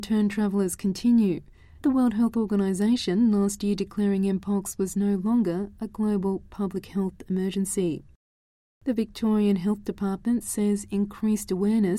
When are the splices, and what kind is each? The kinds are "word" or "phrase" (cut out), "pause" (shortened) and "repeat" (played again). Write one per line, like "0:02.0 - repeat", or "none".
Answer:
0:01.8 - word